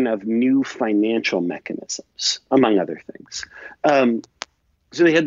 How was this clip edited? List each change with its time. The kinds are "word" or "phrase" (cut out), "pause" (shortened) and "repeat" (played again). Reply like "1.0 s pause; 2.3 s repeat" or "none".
none

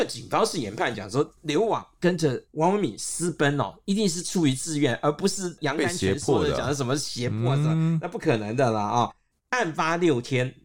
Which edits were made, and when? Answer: none

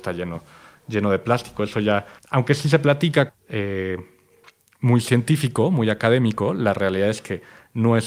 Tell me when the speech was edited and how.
2.2 s pause; 3.3 s phrase

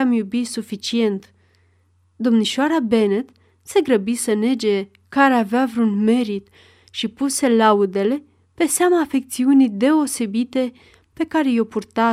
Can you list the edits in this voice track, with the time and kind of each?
none

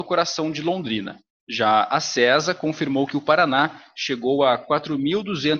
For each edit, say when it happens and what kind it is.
none

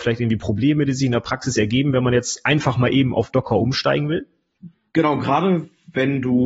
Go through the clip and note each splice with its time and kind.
none

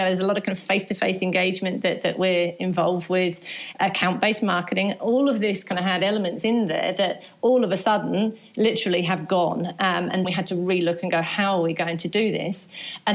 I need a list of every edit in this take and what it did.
10.2 s word

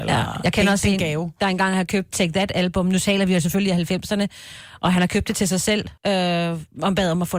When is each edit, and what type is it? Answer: 2.1 s word; 6.0 s pause

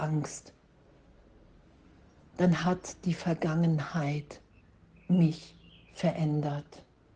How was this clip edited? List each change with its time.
none

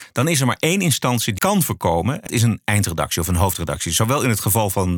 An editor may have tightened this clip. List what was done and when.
1.4 s word; 2.3 s word

